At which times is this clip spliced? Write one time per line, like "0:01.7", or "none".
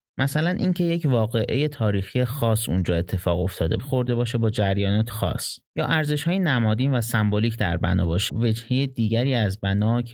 0:03.8
0:05.1
0:05.7
0:08.3